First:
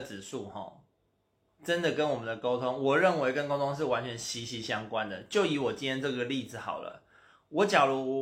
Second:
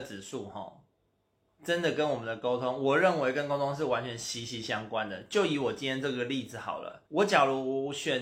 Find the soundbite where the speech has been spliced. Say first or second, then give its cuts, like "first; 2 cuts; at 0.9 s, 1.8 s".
second; 1 cut; at 7.1 s